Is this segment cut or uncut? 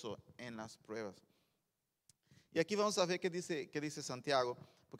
uncut